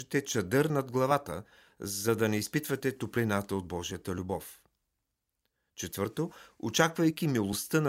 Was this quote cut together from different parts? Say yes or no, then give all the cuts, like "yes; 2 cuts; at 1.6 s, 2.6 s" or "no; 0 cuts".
no; 0 cuts